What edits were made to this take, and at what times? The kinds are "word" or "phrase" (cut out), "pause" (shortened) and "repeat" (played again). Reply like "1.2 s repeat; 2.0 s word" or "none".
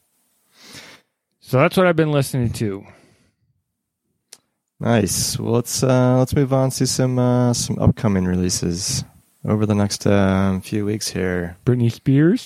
9.2 s pause